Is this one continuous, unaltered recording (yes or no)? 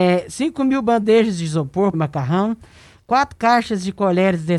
no